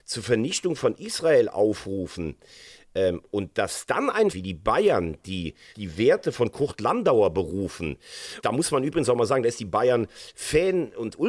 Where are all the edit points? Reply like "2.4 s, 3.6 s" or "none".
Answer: 4.3 s, 5.7 s, 8.4 s